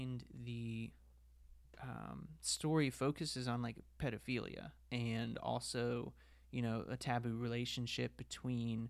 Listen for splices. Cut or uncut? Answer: uncut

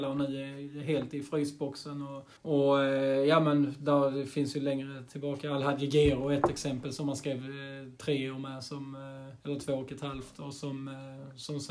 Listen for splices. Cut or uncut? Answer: cut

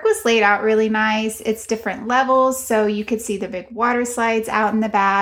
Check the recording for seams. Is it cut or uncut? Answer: uncut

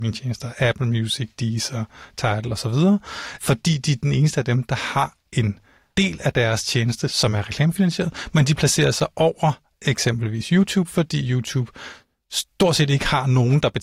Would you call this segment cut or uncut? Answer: uncut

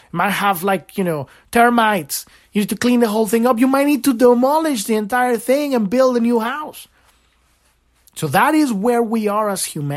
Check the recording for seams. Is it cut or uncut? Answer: uncut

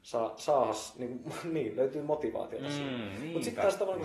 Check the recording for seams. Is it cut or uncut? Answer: uncut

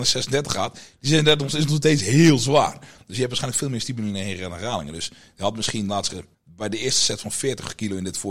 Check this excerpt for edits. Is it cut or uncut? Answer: cut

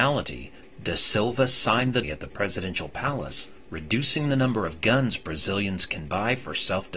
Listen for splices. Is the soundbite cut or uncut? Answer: cut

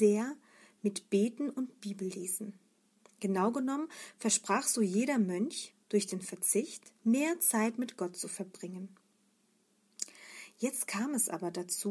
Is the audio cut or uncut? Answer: cut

